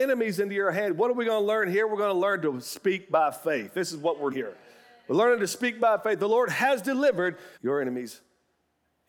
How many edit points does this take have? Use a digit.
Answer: 2